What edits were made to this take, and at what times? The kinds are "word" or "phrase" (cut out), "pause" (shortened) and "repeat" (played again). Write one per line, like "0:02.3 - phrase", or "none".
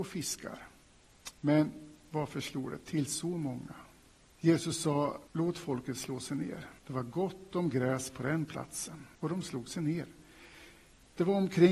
0:04.1 - pause
0:05.3 - pause
0:06.8 - pause
0:09.1 - pause

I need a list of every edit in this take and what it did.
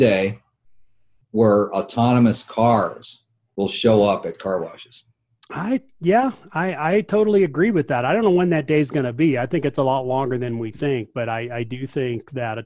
none

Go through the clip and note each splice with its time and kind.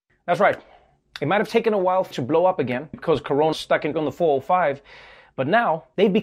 0:02.1 - word
0:02.9 - word
0:03.5 - word
0:03.9 - word

